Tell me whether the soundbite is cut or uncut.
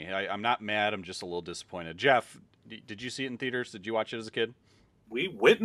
uncut